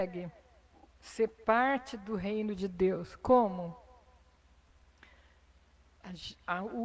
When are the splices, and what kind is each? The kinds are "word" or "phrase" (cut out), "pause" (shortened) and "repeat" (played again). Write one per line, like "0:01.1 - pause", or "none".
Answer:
none